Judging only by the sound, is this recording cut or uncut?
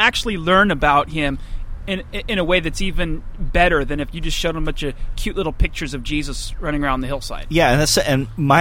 uncut